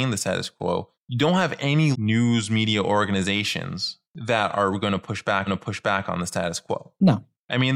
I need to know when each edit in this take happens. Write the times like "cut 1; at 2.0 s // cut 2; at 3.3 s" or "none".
cut 1; at 0.9 s // cut 2; at 1.9 s // cut 3; at 4.0 s // cut 4; at 5.5 s